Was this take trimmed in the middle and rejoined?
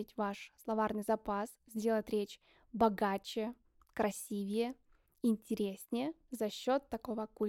no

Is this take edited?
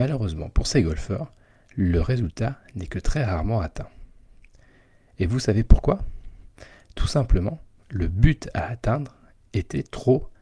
no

